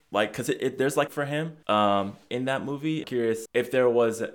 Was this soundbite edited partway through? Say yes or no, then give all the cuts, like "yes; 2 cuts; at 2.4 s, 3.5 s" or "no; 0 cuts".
yes; 4 cuts; at 1.1 s, 1.6 s, 3.0 s, 3.5 s